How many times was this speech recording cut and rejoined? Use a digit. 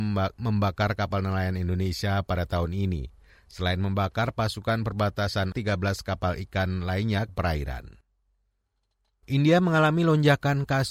2